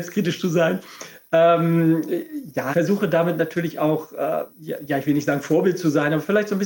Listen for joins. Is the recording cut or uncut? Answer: cut